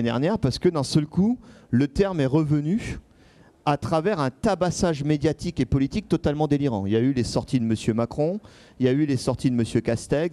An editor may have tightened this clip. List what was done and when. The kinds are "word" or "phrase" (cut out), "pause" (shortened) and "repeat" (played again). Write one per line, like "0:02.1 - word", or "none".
none